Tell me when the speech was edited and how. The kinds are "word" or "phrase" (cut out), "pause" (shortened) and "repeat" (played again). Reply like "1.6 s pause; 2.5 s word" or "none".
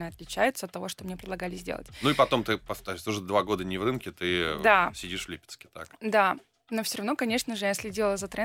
none